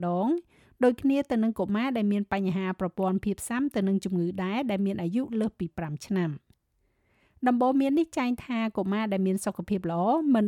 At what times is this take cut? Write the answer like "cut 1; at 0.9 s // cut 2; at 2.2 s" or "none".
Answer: none

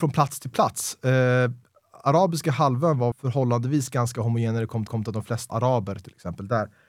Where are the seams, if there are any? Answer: cut 1; at 3.1 s // cut 2; at 4.9 s // cut 3; at 5.5 s

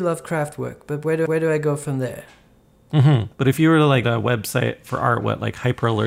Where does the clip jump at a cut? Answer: cut 1; at 1.3 s // cut 2; at 3.3 s // cut 3; at 4.0 s

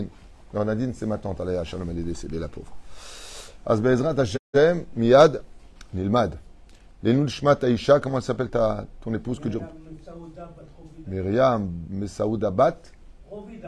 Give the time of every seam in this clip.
none

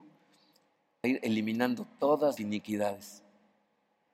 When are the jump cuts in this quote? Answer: cut 1; at 1.0 s // cut 2; at 2.4 s

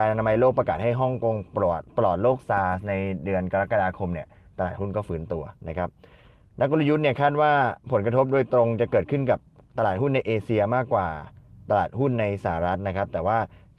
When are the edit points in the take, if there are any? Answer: cut 1; at 5.6 s

